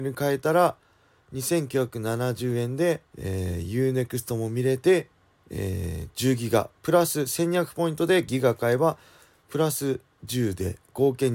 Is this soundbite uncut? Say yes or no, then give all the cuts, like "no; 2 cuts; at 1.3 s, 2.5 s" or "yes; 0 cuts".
no; 2 cuts; at 3.1 s, 5.4 s